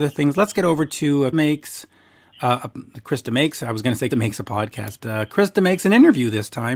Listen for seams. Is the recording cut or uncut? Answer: cut